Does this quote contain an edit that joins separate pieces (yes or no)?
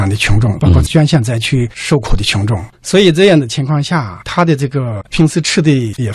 yes